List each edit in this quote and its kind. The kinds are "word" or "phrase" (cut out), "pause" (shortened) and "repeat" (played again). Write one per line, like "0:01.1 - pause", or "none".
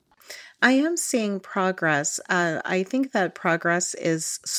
none